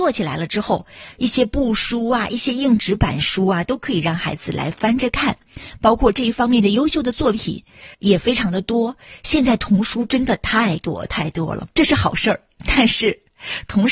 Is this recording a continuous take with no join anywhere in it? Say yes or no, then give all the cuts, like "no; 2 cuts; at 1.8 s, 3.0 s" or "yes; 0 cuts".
no; 2 cuts; at 7.9 s, 11.7 s